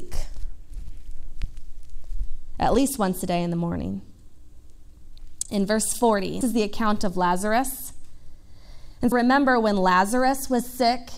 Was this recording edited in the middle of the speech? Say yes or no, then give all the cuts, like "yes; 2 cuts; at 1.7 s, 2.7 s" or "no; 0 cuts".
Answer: yes; 2 cuts; at 6.4 s, 9.1 s